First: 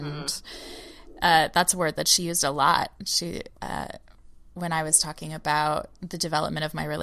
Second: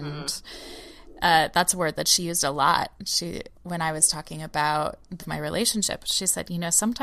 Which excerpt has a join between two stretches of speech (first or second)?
second